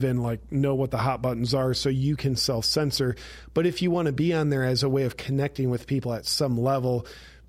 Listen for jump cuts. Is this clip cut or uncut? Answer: uncut